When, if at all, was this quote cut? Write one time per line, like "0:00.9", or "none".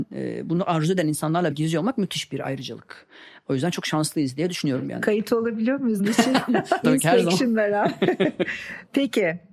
0:01.5
0:06.0
0:06.8